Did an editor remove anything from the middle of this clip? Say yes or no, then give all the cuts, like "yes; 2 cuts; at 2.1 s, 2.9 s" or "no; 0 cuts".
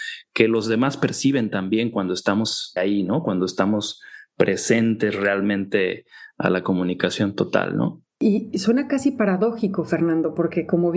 yes; 1 cut; at 2.8 s